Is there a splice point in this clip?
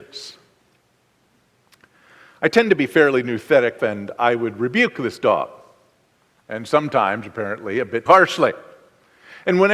yes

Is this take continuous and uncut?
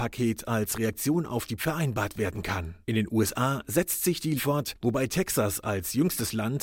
no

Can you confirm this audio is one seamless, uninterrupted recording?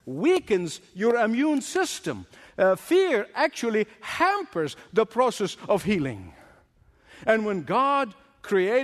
yes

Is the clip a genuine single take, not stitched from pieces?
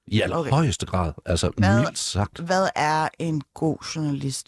yes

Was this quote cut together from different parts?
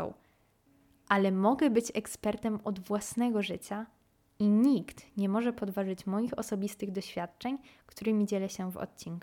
no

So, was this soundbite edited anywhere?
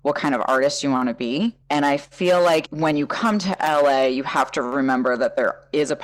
yes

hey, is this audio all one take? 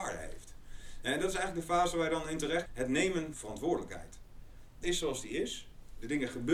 no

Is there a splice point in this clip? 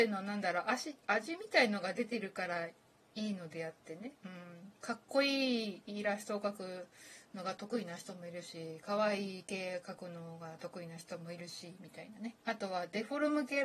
yes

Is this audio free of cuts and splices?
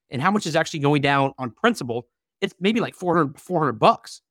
yes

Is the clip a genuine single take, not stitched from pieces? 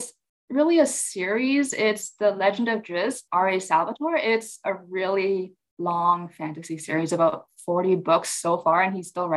no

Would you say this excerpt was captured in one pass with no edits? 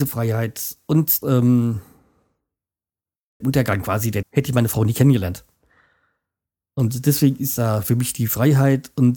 no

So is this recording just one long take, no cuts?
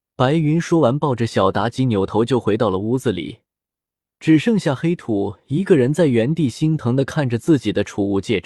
yes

